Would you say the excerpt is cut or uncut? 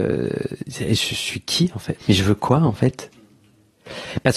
cut